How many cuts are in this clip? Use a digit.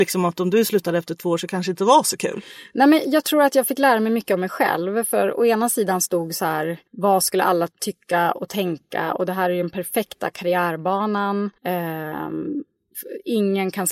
3